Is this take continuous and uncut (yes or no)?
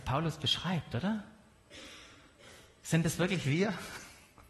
yes